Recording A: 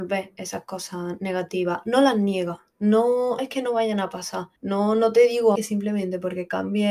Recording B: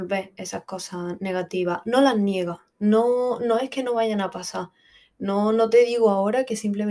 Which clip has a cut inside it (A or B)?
A